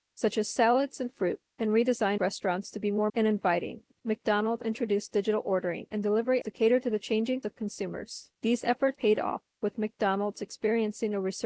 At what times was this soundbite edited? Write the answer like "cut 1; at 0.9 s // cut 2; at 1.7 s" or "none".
cut 1; at 2.2 s // cut 2; at 3.1 s // cut 3; at 4.6 s // cut 4; at 6.4 s // cut 5; at 7.4 s // cut 6; at 8.9 s